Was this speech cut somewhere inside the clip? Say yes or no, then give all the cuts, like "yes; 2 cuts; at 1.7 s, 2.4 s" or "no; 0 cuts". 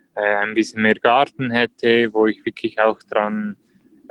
no; 0 cuts